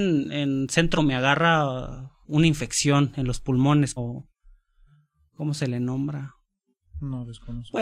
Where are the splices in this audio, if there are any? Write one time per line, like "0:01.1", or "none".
0:01.0
0:02.2
0:04.0